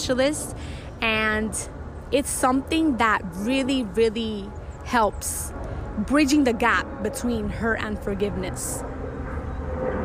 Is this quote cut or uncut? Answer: uncut